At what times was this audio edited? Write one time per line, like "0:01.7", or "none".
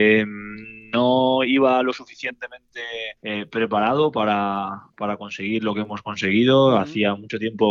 0:03.2